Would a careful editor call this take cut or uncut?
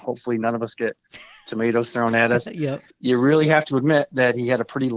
cut